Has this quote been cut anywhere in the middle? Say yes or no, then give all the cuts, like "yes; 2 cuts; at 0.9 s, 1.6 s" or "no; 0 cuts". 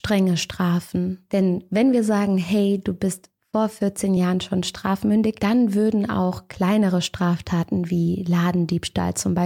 no; 0 cuts